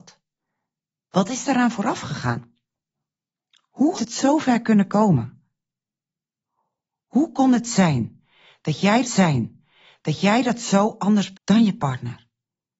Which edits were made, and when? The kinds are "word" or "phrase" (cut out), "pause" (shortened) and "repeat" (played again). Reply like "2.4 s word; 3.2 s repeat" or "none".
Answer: 4.0 s word; 9.0 s repeat; 11.3 s word